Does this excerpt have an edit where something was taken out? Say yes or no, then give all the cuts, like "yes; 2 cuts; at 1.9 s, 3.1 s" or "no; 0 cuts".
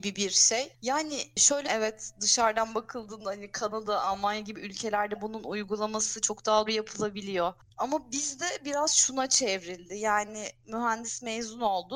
yes; 2 cuts; at 1.6 s, 6.7 s